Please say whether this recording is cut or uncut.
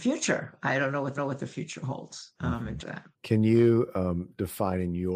cut